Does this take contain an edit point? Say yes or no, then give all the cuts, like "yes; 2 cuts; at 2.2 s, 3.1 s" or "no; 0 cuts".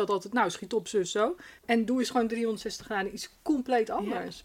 yes; 1 cut; at 1.6 s